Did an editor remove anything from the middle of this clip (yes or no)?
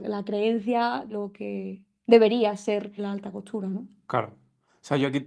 yes